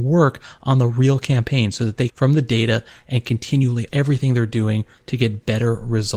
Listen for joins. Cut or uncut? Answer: cut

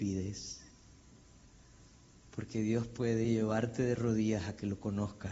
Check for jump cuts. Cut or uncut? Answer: uncut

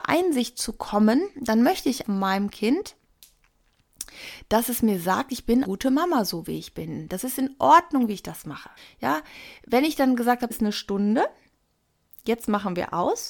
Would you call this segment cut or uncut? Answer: cut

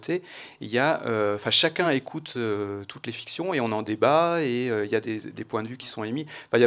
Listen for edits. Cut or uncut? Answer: uncut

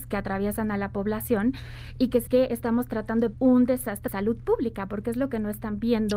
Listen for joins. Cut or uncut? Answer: cut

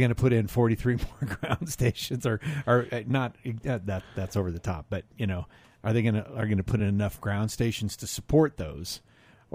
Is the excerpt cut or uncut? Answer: uncut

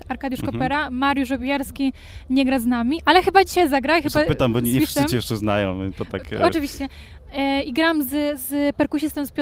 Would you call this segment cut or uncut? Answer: uncut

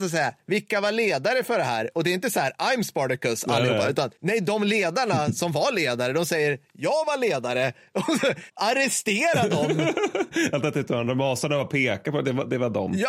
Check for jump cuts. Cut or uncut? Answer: uncut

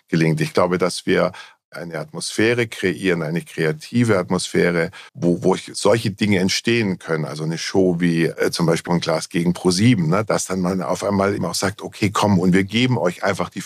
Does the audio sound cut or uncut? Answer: cut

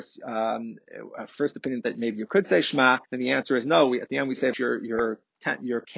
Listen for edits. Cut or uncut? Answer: cut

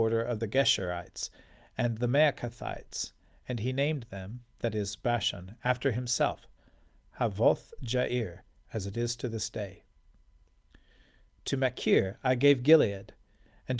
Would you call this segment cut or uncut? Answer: uncut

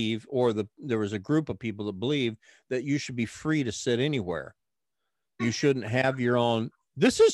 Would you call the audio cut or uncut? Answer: uncut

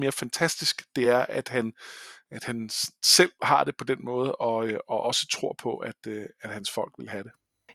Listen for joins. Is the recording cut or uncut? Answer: uncut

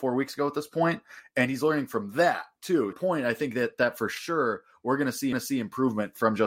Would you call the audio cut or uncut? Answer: cut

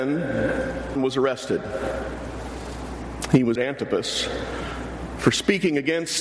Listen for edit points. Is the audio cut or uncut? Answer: cut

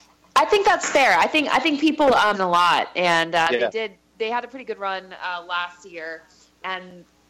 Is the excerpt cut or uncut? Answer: cut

